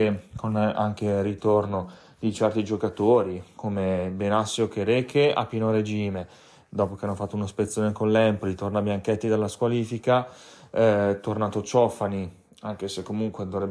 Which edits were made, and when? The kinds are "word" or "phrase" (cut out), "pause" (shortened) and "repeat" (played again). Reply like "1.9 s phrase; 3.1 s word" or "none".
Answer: none